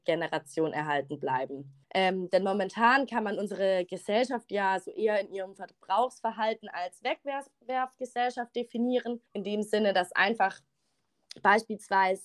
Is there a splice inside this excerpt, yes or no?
yes